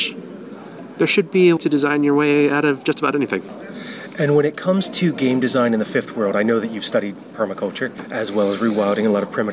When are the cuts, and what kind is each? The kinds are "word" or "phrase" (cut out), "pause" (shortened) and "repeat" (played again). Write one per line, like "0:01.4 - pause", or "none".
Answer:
0:01.6 - word